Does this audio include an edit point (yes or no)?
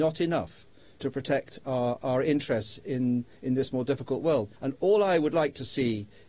yes